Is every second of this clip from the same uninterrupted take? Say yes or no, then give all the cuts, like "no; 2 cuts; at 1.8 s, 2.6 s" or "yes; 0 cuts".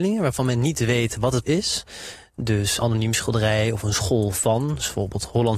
no; 2 cuts; at 1.5 s, 2.8 s